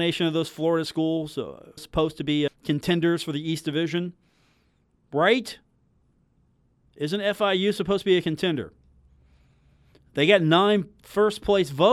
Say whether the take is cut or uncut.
cut